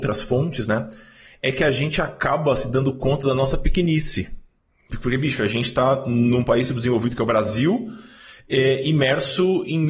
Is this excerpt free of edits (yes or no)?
no